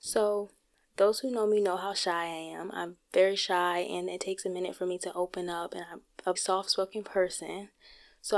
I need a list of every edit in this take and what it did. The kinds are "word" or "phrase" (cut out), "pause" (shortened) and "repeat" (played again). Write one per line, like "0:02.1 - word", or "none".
0:06.4 - word